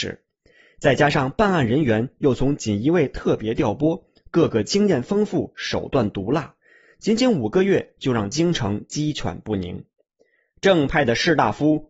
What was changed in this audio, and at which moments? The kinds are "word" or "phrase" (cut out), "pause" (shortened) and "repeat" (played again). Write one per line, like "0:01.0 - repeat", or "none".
none